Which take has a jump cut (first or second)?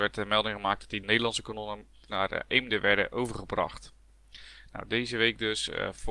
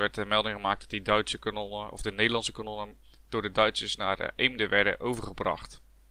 first